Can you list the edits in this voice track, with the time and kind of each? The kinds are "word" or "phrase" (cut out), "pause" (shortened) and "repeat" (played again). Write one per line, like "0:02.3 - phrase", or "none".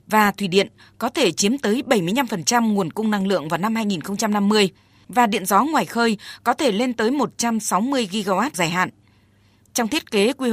0:08.5 - word

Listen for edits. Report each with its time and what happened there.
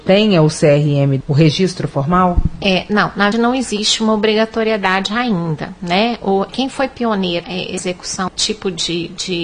0:01.2 - word
0:03.3 - word
0:06.5 - word
0:07.4 - word
0:08.3 - word

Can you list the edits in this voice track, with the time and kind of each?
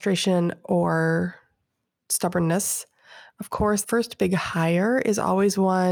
0:03.8 - word

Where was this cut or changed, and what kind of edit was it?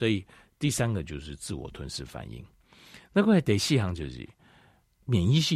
none

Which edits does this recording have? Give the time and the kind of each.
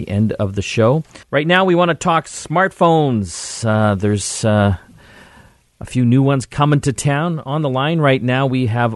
0:01.2 - pause

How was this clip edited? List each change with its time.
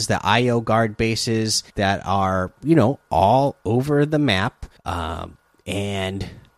0:01.7 - pause
0:04.8 - pause

